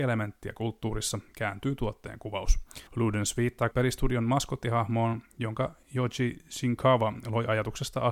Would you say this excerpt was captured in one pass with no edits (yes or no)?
no